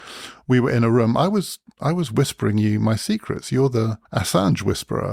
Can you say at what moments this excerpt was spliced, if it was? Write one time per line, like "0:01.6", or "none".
0:04.1